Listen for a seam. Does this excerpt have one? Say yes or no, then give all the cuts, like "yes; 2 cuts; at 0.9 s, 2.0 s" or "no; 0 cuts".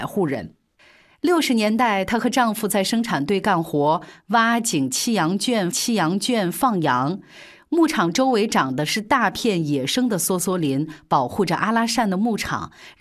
yes; 1 cut; at 5.7 s